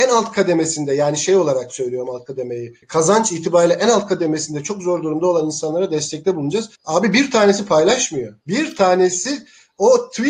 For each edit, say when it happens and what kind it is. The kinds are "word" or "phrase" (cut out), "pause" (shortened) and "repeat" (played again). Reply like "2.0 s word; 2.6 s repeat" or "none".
2.8 s pause; 6.7 s pause; 8.4 s pause